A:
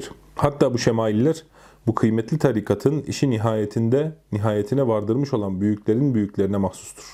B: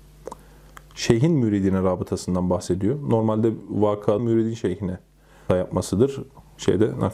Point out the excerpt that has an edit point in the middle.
B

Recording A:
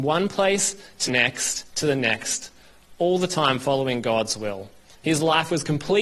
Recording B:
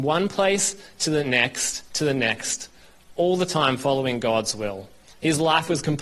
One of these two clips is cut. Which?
A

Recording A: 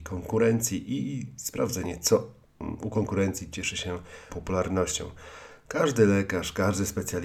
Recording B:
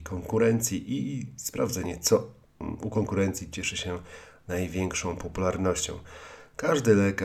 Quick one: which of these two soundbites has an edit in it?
A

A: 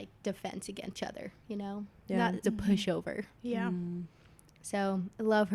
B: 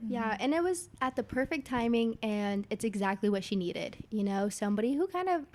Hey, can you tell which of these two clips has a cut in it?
A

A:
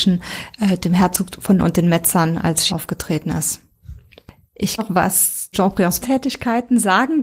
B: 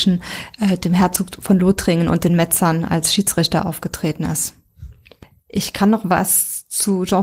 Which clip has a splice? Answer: A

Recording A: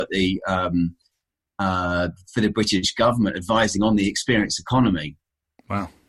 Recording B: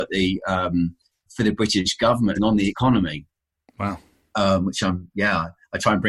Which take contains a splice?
B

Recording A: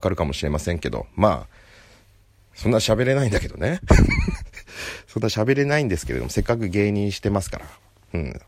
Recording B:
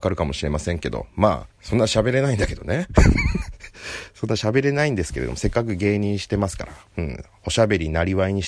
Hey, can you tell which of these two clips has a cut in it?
B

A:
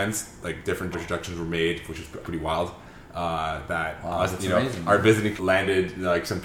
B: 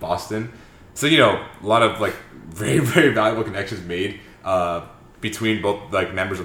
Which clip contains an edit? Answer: A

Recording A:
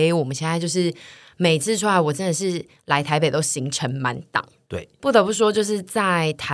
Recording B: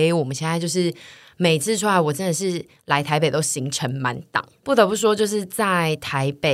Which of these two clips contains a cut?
B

